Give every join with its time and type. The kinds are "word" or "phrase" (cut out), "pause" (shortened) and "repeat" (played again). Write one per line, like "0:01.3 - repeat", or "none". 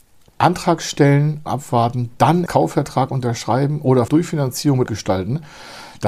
0:01.5 - word
0:02.5 - word
0:04.1 - phrase
0:04.9 - phrase